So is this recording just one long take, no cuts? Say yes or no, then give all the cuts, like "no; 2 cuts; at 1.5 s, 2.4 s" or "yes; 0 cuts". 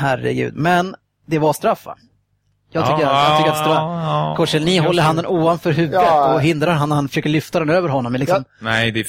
yes; 0 cuts